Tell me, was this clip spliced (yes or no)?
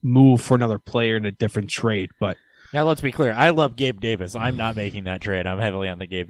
no